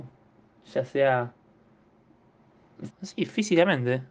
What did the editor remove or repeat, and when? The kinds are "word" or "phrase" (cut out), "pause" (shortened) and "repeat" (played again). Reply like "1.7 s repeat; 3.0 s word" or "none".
2.9 s word